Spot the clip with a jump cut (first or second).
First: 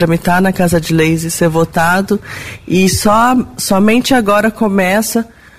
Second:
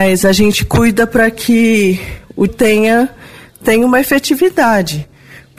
second